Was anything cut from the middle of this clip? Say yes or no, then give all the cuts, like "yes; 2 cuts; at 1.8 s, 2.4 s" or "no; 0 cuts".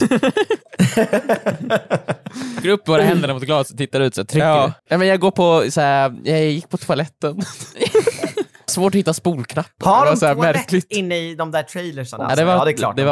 yes; 3 cuts; at 2.6 s, 4.8 s, 8.7 s